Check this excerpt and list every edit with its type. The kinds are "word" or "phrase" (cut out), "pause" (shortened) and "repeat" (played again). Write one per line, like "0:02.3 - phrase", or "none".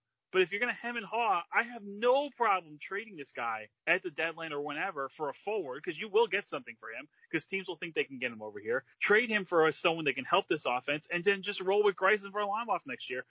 0:03.8 - pause
0:08.9 - pause